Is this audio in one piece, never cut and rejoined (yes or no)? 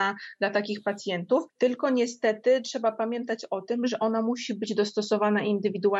no